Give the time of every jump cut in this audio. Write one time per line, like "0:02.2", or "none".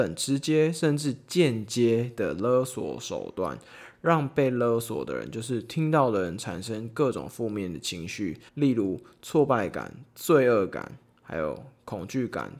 0:08.5